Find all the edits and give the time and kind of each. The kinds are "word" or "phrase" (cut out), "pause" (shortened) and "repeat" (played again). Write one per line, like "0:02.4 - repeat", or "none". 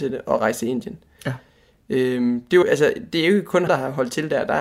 0:02.6 - word
0:03.7 - word